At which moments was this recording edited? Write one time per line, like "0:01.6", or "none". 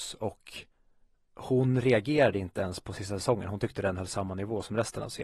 none